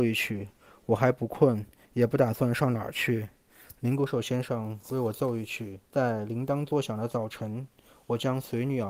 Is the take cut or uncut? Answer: cut